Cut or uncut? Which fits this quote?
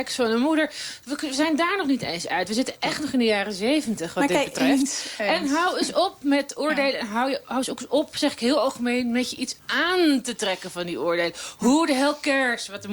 cut